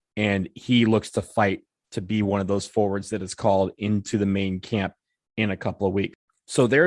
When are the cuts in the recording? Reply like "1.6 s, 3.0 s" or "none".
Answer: none